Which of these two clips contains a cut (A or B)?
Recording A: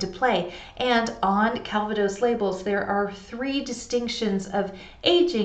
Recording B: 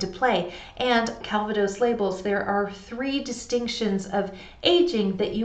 B